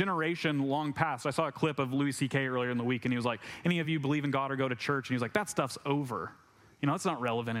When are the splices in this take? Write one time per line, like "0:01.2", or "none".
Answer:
none